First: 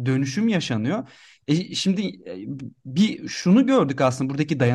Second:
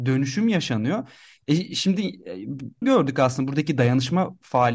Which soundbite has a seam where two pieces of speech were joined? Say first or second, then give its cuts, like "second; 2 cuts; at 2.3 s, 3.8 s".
second; 1 cut; at 2.8 s